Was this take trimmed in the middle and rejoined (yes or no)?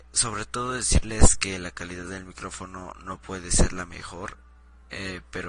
no